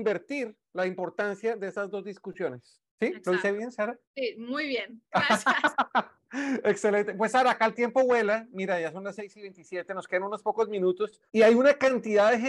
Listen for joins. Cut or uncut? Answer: cut